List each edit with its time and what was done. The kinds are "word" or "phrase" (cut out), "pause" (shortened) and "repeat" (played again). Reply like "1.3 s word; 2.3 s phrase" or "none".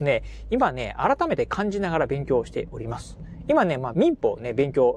3.9 s word